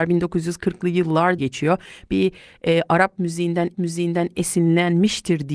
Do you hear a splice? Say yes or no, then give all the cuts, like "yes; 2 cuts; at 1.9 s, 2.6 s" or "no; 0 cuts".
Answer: yes; 2 cuts; at 1.4 s, 3.7 s